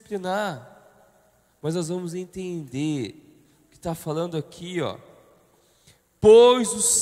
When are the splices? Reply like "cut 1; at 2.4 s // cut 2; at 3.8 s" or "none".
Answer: none